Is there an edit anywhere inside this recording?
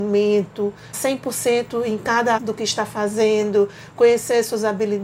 yes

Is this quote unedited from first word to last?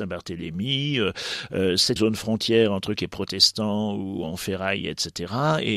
no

